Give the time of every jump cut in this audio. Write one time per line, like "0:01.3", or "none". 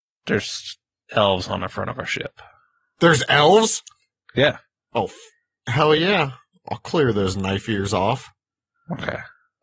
none